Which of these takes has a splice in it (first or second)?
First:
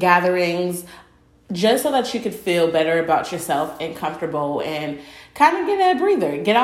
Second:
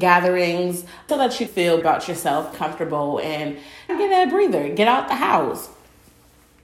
second